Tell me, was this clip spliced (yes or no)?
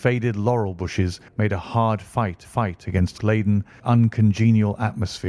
yes